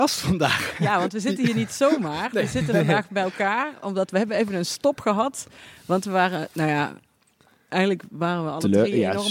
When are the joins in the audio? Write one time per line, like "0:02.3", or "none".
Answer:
none